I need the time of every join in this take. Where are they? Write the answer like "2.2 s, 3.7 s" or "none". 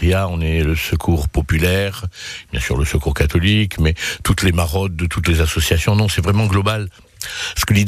none